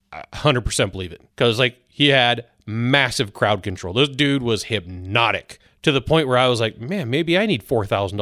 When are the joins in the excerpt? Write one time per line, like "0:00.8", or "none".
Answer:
0:01.3
0:05.7